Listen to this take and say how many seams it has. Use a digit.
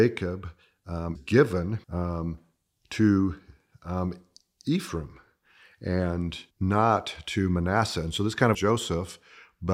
4